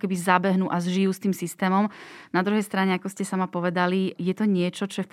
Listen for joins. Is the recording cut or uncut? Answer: uncut